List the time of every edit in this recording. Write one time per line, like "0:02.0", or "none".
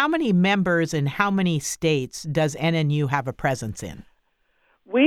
none